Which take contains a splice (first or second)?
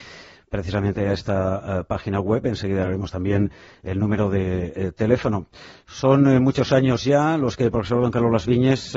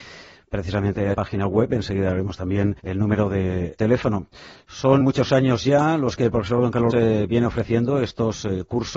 second